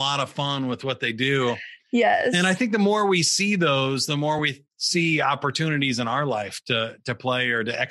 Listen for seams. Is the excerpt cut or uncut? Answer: uncut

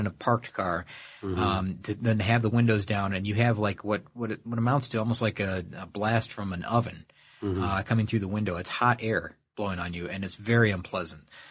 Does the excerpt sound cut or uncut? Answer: uncut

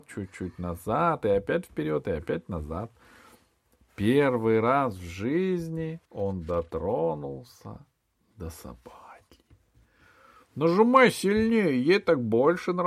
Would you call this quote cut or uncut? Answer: cut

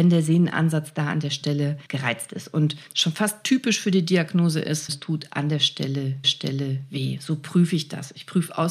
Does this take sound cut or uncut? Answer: cut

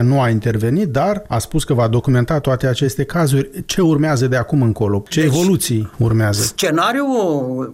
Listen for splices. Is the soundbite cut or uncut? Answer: uncut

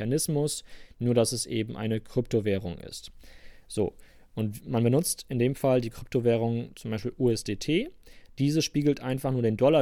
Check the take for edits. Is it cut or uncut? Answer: uncut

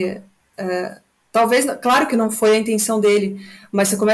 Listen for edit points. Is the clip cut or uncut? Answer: uncut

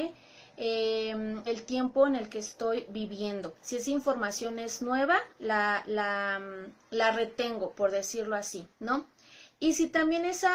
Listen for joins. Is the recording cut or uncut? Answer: cut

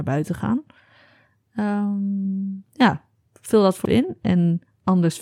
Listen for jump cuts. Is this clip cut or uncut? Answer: cut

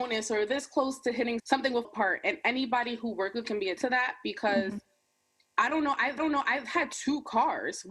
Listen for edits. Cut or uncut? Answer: cut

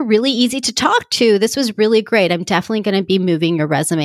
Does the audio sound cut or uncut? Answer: uncut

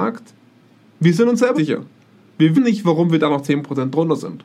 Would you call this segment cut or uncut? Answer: cut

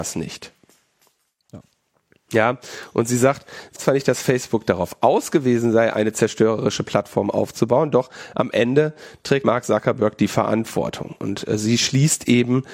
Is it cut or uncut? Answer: cut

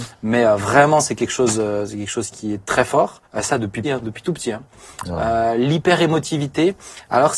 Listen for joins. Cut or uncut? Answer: cut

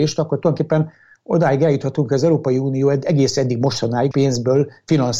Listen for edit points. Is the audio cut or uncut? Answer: cut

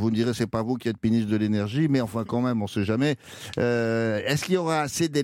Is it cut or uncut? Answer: uncut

